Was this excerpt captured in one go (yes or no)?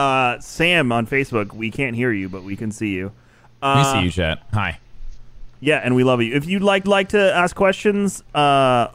no